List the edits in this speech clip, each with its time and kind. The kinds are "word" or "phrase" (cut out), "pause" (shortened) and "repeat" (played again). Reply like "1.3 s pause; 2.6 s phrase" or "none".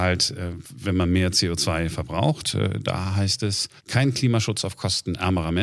3.8 s pause